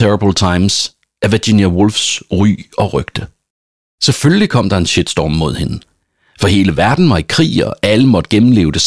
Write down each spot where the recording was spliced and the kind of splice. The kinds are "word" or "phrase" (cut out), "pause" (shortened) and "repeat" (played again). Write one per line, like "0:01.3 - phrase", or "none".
none